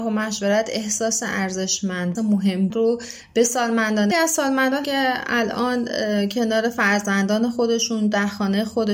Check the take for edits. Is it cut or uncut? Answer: cut